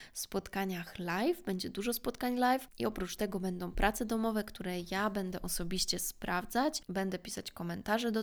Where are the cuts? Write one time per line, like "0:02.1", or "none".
none